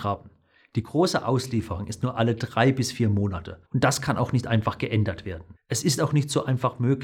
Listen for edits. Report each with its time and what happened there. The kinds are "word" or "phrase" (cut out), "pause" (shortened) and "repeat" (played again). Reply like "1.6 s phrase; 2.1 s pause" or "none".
3.6 s pause; 5.6 s pause